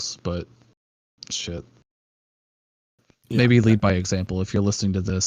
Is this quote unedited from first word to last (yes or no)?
yes